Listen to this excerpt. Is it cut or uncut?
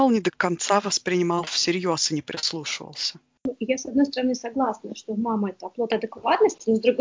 uncut